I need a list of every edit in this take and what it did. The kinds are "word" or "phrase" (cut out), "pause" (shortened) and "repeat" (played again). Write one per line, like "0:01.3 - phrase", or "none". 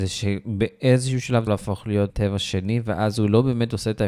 0:01.5 - phrase
0:02.1 - word